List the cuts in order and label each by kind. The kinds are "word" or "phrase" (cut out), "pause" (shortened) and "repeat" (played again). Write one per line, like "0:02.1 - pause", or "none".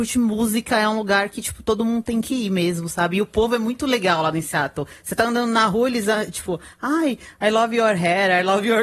none